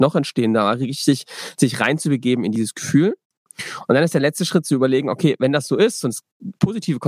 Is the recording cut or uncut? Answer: uncut